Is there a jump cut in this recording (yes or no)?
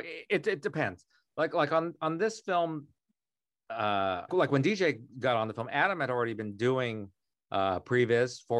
yes